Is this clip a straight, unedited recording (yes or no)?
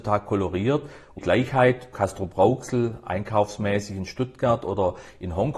no